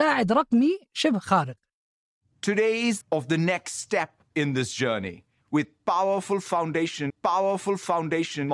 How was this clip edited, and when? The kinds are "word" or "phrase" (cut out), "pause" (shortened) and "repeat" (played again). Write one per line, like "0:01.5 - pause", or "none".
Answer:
0:03.0 - phrase
0:07.1 - repeat